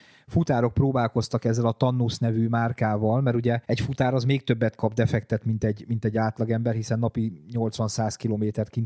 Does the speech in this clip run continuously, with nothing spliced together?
no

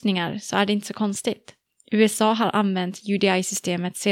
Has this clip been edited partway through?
no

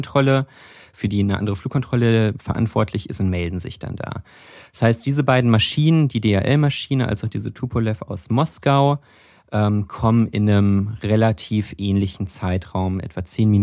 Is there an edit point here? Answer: no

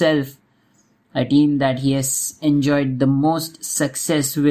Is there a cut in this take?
no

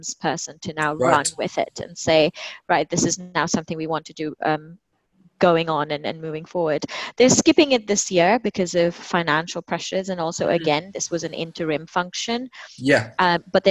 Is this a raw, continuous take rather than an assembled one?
yes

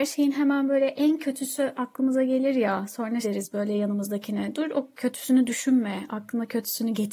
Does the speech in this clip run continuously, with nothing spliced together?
no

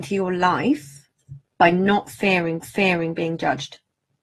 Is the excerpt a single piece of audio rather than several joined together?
no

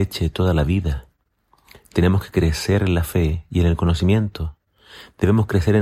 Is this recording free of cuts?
yes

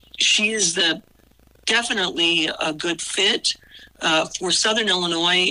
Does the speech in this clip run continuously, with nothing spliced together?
yes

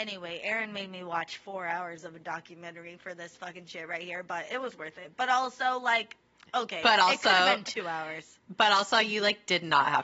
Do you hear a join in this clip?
no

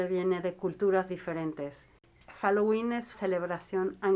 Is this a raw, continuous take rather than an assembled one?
no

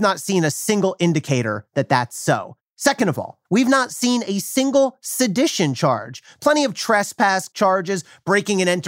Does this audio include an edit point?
yes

